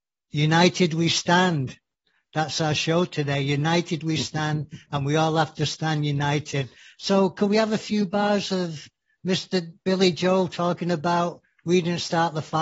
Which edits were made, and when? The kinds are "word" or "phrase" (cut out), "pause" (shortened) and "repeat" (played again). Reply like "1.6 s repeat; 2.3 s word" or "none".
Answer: none

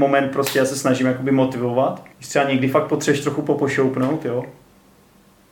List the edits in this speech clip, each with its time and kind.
2.1 s pause

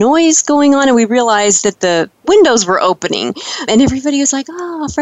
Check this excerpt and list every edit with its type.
3.7 s word

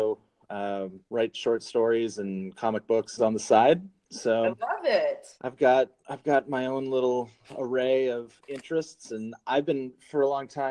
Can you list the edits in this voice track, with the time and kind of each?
1.1 s pause; 3.2 s phrase; 5.4 s pause

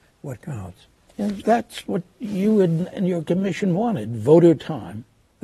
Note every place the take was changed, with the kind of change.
2.9 s word

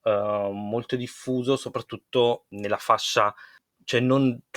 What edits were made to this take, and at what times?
none

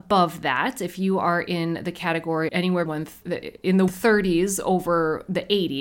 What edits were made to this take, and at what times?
2.5 s word; 2.9 s word; 3.9 s word

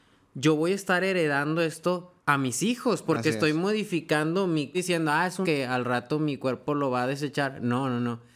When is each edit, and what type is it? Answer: 2.2 s pause; 4.7 s phrase; 5.4 s word

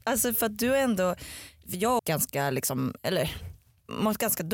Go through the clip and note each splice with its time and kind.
2.0 s phrase

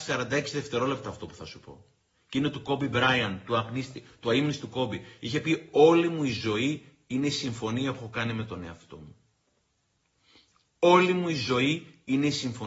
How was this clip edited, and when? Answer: none

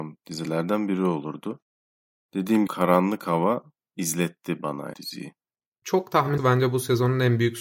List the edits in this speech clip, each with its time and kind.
2.7 s phrase; 3.8 s word; 4.9 s word; 5.6 s pause; 6.4 s phrase

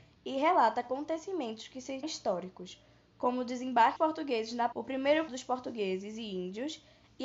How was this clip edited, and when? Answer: 2.0 s word; 4.0 s word; 4.7 s word; 5.3 s word

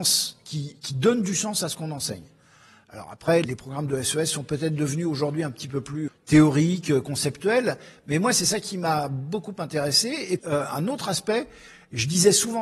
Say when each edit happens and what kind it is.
3.4 s word; 6.1 s word; 10.4 s word

